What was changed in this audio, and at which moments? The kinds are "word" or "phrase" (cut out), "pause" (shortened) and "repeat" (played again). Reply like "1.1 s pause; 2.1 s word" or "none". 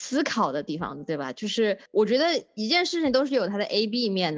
1.9 s pause

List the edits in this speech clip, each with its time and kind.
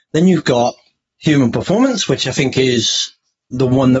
none

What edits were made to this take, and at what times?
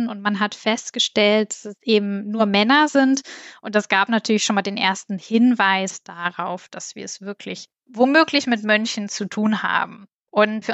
none

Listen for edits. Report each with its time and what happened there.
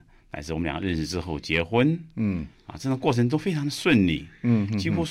none

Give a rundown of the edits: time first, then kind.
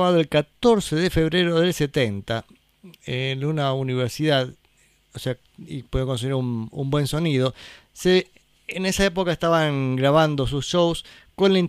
none

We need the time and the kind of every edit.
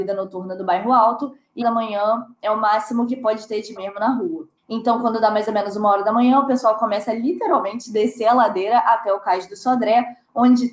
1.6 s phrase; 3.8 s word; 4.6 s pause

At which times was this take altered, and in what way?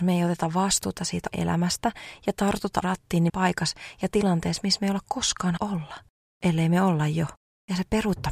1.3 s word; 2.8 s word; 3.3 s phrase; 5.6 s word

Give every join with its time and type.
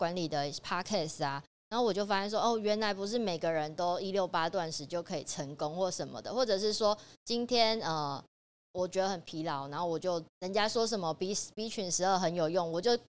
none

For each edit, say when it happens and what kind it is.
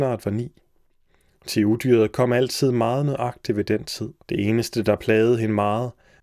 4.2 s pause

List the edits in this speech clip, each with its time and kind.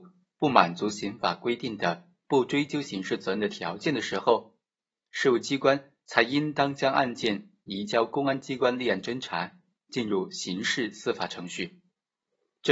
none

